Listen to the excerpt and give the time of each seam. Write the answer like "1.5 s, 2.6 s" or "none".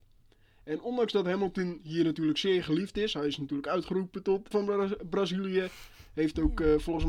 4.5 s